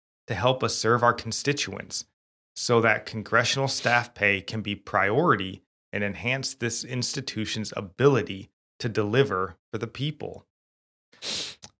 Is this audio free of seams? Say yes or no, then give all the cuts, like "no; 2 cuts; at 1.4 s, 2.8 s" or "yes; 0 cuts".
yes; 0 cuts